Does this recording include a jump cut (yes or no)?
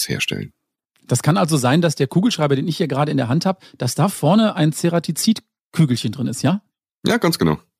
no